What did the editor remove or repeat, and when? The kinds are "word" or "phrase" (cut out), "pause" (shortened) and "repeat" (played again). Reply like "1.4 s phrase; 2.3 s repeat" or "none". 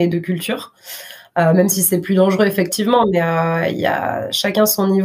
none